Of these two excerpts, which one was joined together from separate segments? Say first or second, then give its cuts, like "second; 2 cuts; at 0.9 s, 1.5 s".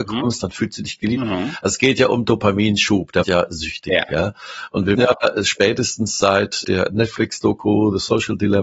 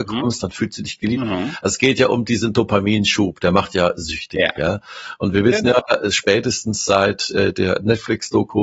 first; 4 cuts; at 2.2 s, 3.2 s, 4.9 s, 6.6 s